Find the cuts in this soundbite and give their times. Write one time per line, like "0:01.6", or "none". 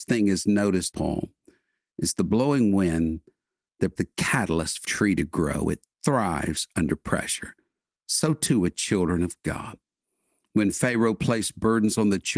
0:00.9
0:04.0
0:04.8